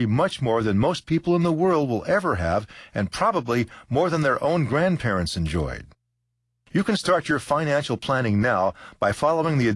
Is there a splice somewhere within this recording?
no; 0 cuts

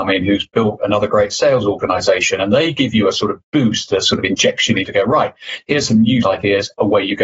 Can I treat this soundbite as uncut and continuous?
no; 2 cuts; at 4.8 s, 6.2 s

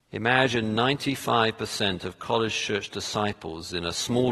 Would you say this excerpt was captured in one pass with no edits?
yes; 0 cuts

